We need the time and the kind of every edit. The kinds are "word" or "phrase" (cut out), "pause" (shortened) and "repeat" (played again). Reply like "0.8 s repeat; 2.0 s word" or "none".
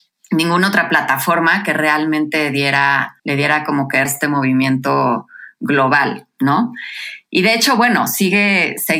3.2 s pause; 4.1 s phrase